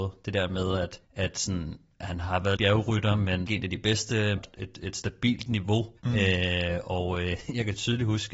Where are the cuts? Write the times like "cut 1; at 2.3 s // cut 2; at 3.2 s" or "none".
cut 1; at 1.0 s // cut 2; at 2.6 s // cut 3; at 3.5 s // cut 4; at 4.4 s // cut 5; at 6.0 s